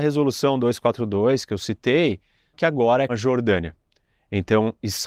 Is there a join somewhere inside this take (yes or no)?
yes